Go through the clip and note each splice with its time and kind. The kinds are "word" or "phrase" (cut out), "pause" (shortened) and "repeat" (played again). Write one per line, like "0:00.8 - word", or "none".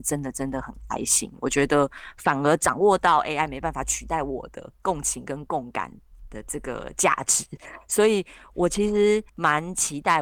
0:04.7 - pause
0:09.3 - pause